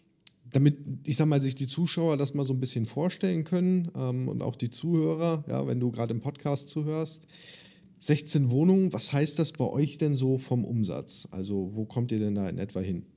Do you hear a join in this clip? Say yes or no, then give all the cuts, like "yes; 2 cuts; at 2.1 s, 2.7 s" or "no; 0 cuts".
no; 0 cuts